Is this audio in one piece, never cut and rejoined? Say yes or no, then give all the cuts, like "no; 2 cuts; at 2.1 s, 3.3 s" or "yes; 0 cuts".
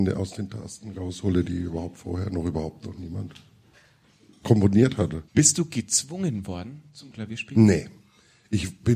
no; 2 cuts; at 3.7 s, 5.3 s